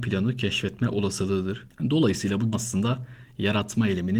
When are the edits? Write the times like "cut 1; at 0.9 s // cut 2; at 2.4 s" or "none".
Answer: cut 1; at 2.5 s